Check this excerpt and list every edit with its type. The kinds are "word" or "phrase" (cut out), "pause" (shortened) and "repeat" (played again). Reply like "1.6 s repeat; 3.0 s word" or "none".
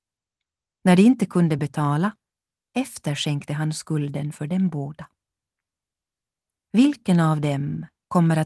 none